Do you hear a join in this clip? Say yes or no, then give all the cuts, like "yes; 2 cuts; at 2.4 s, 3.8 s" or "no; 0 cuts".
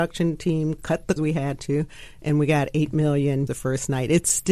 yes; 2 cuts; at 1.2 s, 3.5 s